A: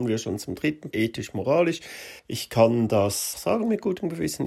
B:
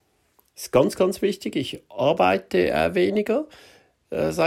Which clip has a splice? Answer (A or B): A